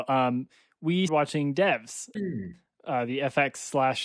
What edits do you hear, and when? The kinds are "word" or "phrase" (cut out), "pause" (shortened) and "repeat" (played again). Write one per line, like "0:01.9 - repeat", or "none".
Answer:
0:01.1 - word
0:02.1 - word

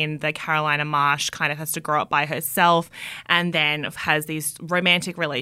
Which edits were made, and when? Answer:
none

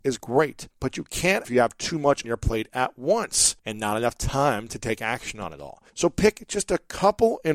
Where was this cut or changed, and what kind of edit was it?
0:01.4 - phrase
0:02.2 - word
0:05.9 - pause

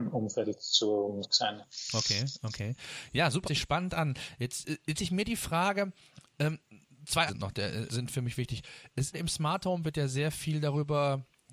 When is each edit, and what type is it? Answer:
0:01.2 - word
0:03.4 - word
0:05.0 - word
0:07.3 - word
0:07.9 - word
0:09.1 - word
0:09.8 - word

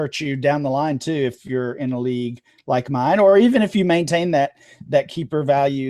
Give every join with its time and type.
none

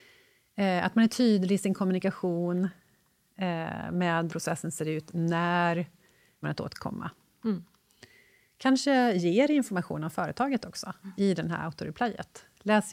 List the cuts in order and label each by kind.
0:04.3 - word
0:06.4 - word

